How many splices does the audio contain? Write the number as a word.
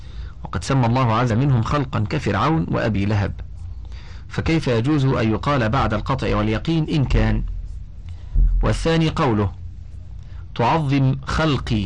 one